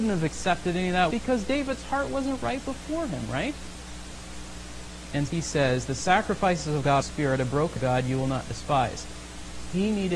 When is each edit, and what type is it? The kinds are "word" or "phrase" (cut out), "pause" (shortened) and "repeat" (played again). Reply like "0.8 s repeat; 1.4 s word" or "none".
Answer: 1.1 s word; 5.3 s word; 7.0 s phrase; 7.8 s phrase